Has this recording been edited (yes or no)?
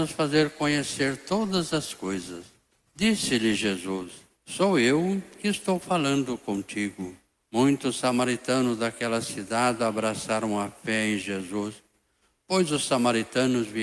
yes